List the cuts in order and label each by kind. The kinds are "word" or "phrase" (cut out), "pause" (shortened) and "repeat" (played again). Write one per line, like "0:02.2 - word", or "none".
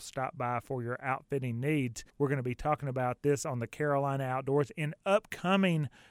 0:02.1 - pause